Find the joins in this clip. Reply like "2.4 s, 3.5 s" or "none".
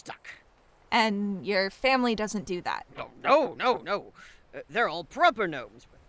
none